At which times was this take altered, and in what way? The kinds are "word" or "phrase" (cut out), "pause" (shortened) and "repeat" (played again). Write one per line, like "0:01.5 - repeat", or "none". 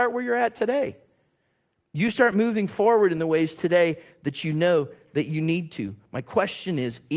none